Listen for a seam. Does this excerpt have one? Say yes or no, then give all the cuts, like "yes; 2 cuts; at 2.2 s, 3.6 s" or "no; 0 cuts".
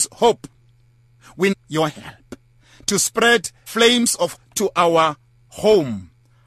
yes; 3 cuts; at 1.5 s, 3.7 s, 4.3 s